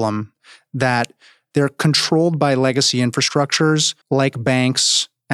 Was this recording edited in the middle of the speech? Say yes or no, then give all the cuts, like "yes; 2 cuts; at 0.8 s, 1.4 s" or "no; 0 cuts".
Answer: yes; 1 cut; at 4.0 s